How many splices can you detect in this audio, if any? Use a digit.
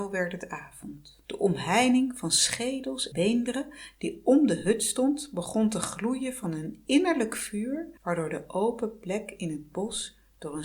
3